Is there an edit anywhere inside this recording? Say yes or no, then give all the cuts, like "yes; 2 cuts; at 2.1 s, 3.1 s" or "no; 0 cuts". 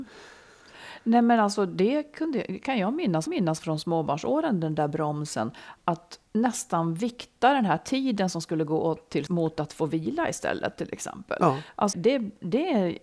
yes; 5 cuts; at 3.3 s, 5.8 s, 6.3 s, 9.3 s, 11.9 s